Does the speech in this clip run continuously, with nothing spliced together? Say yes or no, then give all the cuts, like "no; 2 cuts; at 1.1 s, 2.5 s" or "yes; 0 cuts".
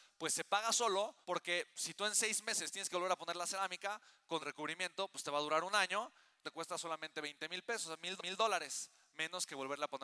no; 4 cuts; at 1.2 s, 4.4 s, 6.4 s, 8.2 s